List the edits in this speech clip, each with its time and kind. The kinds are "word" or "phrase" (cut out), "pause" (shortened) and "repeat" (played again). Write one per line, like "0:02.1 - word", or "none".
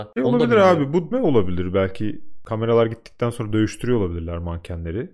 0:01.1 - word